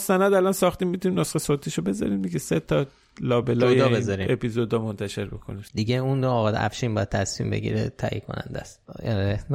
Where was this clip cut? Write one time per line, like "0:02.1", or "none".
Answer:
none